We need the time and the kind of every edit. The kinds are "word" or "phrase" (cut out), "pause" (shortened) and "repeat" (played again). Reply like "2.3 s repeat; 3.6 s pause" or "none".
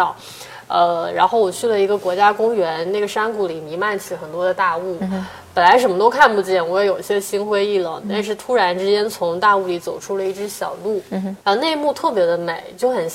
11.4 s pause